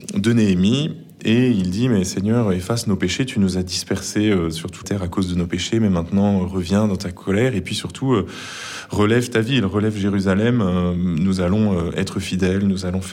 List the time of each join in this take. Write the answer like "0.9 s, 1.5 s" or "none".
4.8 s